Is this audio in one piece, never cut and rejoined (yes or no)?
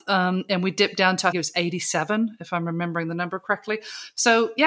no